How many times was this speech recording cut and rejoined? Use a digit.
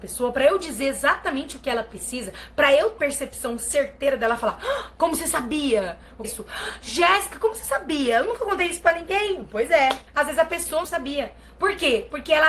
4